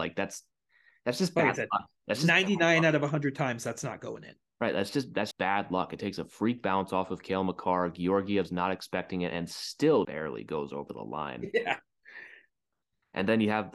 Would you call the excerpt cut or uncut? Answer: cut